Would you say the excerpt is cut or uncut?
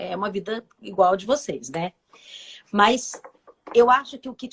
uncut